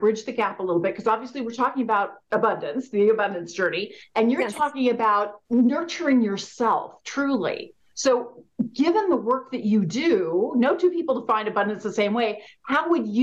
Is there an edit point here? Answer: yes; 1 cut; at 5.4 s

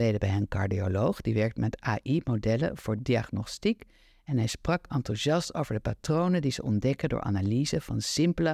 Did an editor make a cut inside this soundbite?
no; 0 cuts

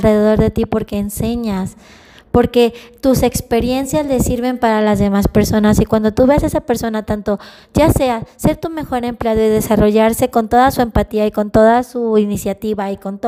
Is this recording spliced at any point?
no; 0 cuts

